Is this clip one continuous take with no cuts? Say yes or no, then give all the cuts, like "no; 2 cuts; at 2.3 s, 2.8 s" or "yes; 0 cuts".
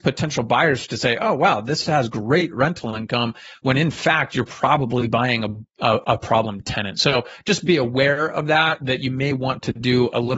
yes; 0 cuts